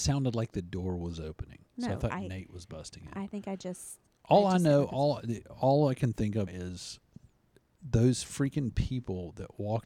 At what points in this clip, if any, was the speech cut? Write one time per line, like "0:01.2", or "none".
0:01.7
0:04.1
0:06.5